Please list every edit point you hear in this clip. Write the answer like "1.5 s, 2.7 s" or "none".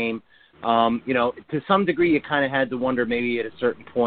none